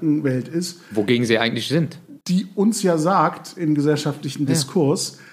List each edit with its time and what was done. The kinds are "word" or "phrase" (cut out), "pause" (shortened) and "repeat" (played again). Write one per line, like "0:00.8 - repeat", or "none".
0:02.2 - pause